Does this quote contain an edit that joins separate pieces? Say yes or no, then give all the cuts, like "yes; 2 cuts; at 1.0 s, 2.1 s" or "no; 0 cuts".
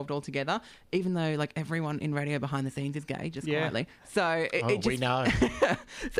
no; 0 cuts